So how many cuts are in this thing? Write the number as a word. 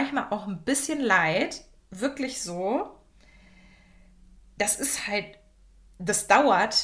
zero